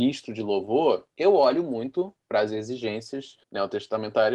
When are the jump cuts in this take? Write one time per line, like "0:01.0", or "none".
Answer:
0:03.4